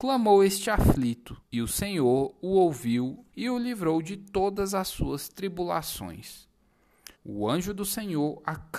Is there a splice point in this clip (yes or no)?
yes